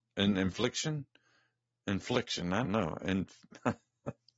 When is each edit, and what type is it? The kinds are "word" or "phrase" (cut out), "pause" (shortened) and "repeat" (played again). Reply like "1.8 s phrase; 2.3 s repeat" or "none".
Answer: 2.6 s word

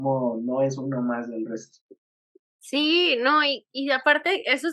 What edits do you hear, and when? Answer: none

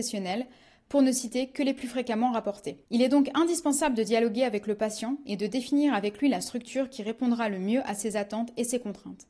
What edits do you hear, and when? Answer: 2.8 s pause

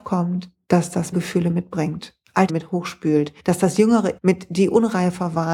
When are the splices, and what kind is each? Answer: 1.1 s phrase; 2.5 s word; 3.4 s pause; 4.2 s word

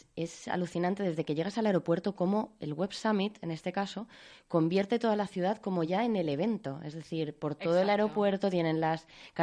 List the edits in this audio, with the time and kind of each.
none

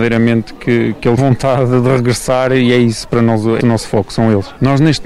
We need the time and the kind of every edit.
1.2 s phrase; 3.6 s word

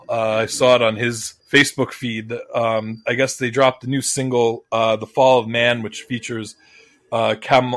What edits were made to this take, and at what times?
1.4 s pause

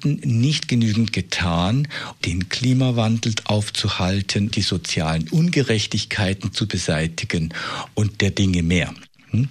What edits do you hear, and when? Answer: 2.2 s word; 4.5 s word

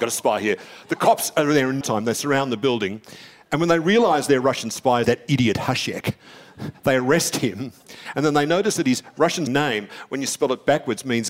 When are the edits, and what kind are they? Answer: 1.8 s word; 5.0 s word; 9.5 s word

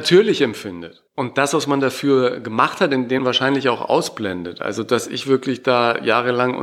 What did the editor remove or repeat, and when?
1.1 s pause; 3.2 s word

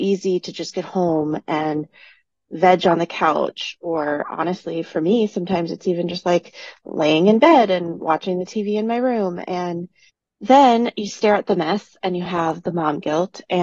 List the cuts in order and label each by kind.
none

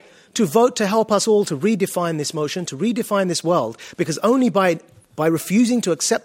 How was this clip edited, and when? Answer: none

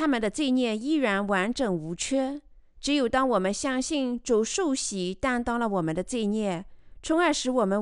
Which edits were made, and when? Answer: 2.5 s pause

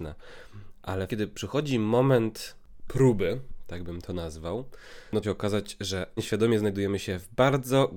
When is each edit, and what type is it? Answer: 1.1 s word; 5.2 s phrase; 6.2 s word

